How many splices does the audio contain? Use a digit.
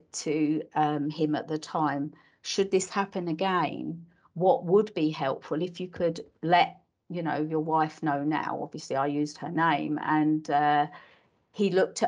0